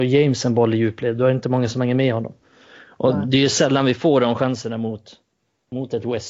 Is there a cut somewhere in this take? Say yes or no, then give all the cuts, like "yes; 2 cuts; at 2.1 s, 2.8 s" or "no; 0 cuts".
no; 0 cuts